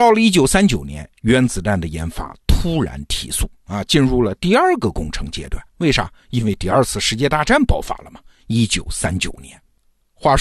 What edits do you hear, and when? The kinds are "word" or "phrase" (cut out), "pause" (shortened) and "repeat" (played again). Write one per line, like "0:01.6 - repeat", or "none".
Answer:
0:05.7 - pause